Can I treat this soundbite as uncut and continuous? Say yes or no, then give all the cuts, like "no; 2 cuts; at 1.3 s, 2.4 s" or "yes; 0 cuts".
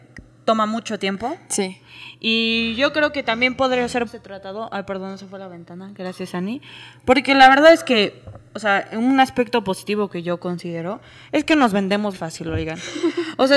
no; 2 cuts; at 4.0 s, 12.1 s